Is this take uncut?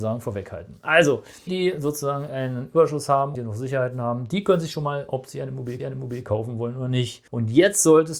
no; 5 cuts; at 1.5 s, 3.3 s, 5.1 s, 5.8 s, 7.3 s

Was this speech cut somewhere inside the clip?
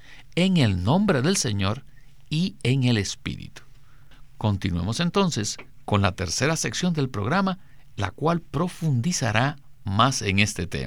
no; 0 cuts

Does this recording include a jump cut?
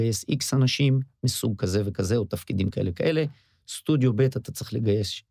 no; 0 cuts

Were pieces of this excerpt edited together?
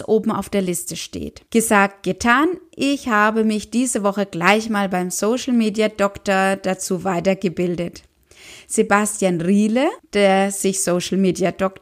yes; 2 cuts; at 1.5 s, 10.0 s

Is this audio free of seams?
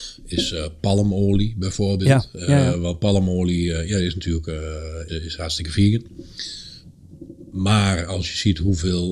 no; 1 cut; at 5.1 s

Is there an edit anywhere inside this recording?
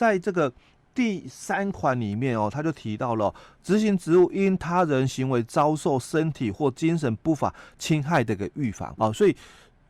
yes; 1 cut; at 9.0 s

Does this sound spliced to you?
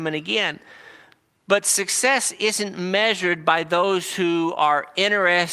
no; 0 cuts

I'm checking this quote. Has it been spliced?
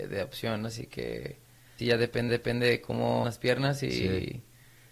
yes; 3 cuts; at 1.8 s, 2.3 s, 3.2 s

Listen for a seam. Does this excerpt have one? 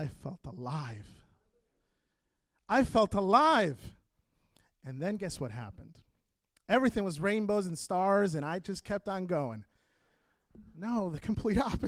no; 0 cuts

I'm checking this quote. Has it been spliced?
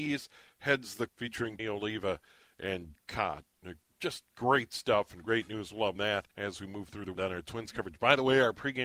yes; 7 cuts; at 1.1 s, 1.6 s, 2.9 s, 4.3 s, 6.0 s, 6.3 s, 7.2 s

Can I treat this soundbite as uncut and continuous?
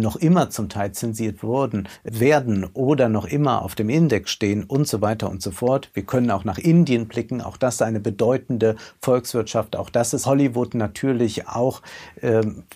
no; 2 cuts; at 2.1 s, 10.2 s

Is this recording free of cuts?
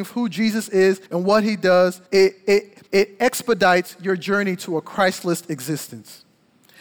no; 3 cuts; at 1.1 s, 2.1 s, 2.9 s

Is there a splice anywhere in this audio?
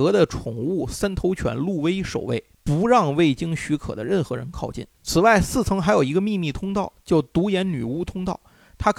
yes; 2 cuts; at 2.5 s, 4.9 s

